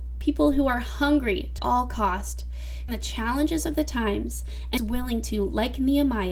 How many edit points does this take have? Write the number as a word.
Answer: three